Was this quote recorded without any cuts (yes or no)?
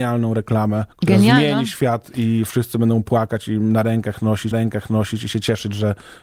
no